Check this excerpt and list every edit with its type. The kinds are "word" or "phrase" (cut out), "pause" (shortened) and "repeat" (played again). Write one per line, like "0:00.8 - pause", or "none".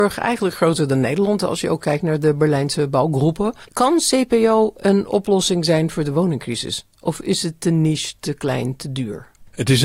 0:03.6 - pause